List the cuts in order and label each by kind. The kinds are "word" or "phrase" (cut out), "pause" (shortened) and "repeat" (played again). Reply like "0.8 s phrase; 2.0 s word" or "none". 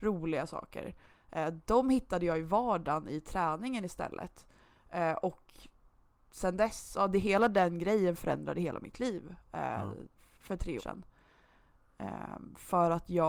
10.8 s word